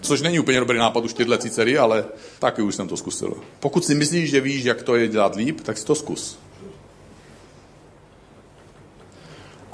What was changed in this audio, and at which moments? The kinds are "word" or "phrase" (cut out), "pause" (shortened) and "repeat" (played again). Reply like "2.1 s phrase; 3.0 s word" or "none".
2.4 s pause; 3.6 s pause